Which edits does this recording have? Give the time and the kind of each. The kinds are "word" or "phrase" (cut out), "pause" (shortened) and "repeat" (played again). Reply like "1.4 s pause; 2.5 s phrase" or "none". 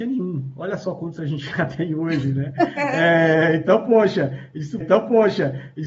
4.8 s repeat

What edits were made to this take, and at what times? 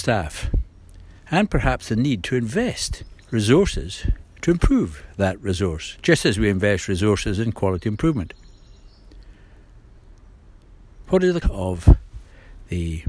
1.2 s pause; 3.2 s pause; 11.4 s word

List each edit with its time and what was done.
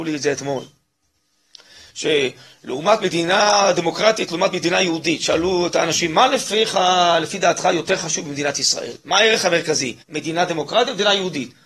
10.0 s pause

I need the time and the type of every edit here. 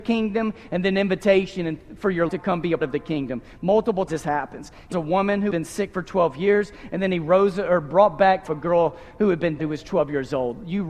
2.3 s word; 2.8 s word; 4.1 s word; 4.9 s word; 5.5 s word; 8.5 s word; 9.6 s word

